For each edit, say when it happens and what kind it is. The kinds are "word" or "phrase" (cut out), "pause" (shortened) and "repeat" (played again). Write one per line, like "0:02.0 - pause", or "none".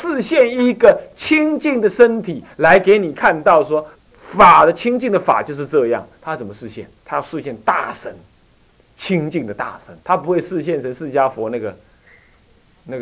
0:03.9 - pause
0:07.0 - pause
0:10.0 - pause